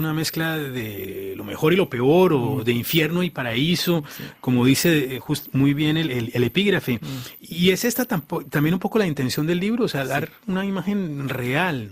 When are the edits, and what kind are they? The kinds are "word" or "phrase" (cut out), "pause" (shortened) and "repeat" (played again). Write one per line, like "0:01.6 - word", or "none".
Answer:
none